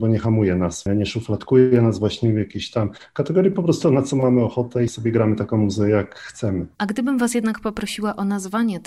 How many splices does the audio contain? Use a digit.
2